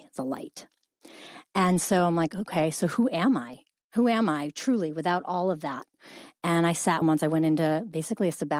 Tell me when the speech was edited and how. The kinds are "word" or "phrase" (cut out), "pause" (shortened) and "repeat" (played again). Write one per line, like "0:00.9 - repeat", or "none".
0:07.0 - phrase

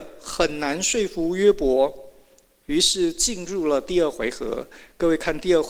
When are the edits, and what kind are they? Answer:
none

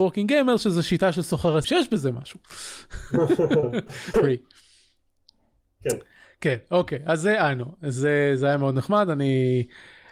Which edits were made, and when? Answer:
0:01.6 - word
0:04.1 - phrase

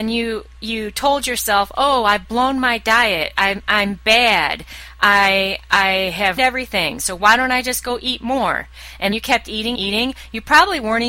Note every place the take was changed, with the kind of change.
0:06.4 - word
0:09.1 - word
0:09.7 - word

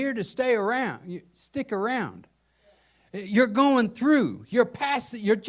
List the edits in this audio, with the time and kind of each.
none

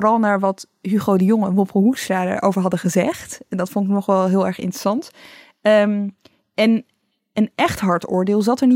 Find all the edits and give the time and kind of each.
none

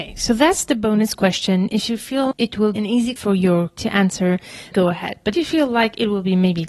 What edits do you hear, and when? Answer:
0:02.3 - word
0:02.8 - word
0:03.2 - word
0:03.8 - word
0:04.7 - word
0:05.3 - word

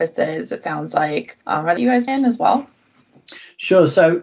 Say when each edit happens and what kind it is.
0:01.4 - pause
0:01.8 - phrase
0:02.1 - word

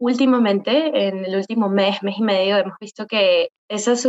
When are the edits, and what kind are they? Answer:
none

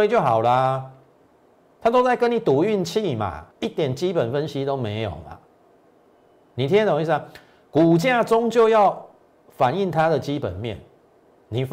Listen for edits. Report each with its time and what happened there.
0:03.5 - pause

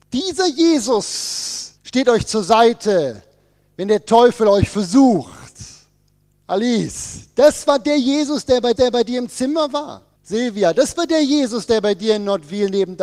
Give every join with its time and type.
0:01.8 - pause
0:08.7 - repeat
0:10.1 - pause

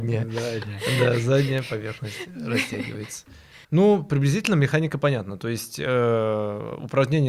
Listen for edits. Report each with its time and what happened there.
0:03.6 - pause

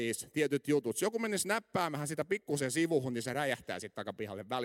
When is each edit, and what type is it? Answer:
none

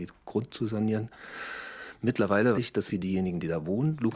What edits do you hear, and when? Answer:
0:02.5 - word
0:02.9 - word

